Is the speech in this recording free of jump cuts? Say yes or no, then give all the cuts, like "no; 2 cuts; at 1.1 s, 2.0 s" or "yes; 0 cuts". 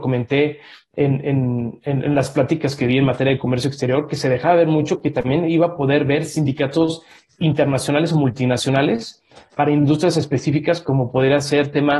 yes; 0 cuts